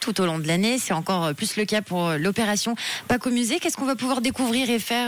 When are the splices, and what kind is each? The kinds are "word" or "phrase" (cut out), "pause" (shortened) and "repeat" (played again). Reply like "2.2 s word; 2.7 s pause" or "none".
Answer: none